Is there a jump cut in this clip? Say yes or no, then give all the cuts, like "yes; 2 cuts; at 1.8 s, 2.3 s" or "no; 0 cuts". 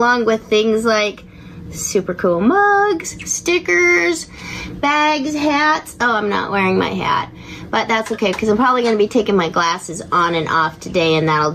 no; 0 cuts